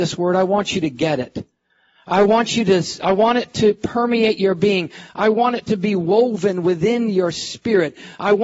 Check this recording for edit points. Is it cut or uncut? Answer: uncut